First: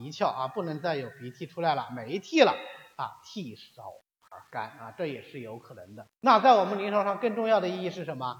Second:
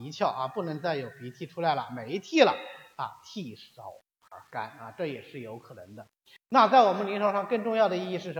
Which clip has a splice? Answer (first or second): first